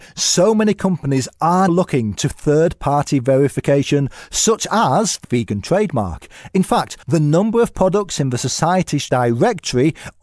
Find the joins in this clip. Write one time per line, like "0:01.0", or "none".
0:01.7
0:05.2
0:07.0
0:09.1